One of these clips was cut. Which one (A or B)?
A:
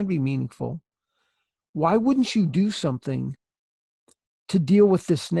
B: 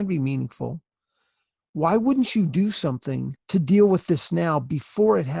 B